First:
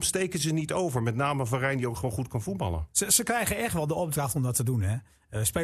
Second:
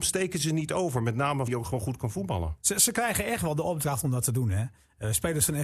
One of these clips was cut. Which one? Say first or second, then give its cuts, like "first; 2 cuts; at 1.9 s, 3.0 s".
second; 1 cut; at 1.5 s